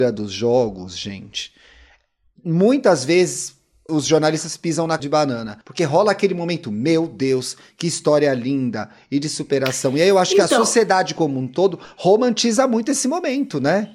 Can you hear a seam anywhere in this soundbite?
yes; 3 cuts; at 3.9 s, 5.0 s, 5.6 s

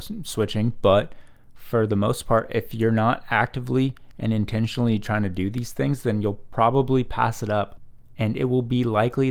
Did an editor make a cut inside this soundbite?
no; 0 cuts

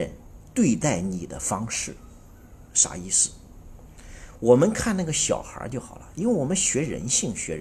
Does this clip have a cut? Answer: yes; 1 cut; at 2.7 s

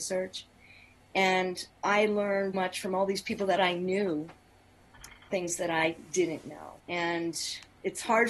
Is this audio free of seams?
no; 5 cuts; at 1.8 s, 2.5 s, 3.6 s, 5.3 s, 6.8 s

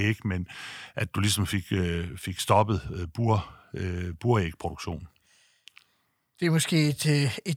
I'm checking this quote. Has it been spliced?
no; 0 cuts

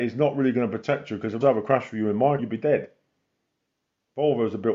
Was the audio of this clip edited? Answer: yes; 2 cuts; at 1.4 s, 2.4 s

